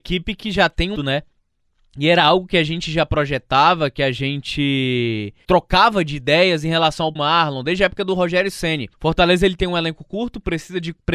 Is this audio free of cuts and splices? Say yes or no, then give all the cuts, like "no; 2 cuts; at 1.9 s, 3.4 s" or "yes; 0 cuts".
no; 4 cuts; at 1.0 s, 5.4 s, 7.2 s, 8.9 s